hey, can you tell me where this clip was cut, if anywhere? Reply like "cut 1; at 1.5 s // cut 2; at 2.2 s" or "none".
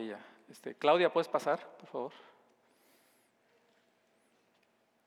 none